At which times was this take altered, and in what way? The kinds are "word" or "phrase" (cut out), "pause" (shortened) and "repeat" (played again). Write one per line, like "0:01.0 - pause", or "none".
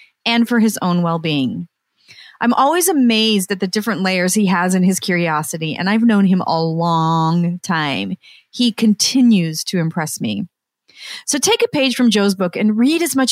none

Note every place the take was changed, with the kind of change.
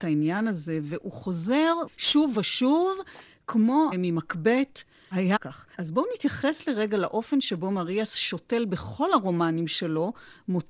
0:01.9 - word
0:02.3 - word
0:03.9 - word
0:05.4 - phrase
0:05.7 - pause

